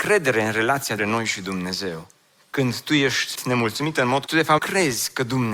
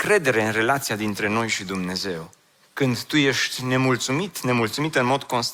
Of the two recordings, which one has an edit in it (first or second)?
first